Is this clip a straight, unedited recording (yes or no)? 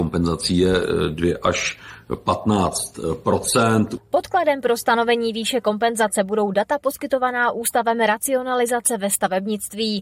yes